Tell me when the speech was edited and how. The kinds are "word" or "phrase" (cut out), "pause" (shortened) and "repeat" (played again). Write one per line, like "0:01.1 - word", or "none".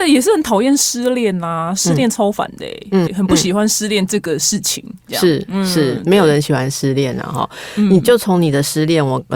0:03.1 - word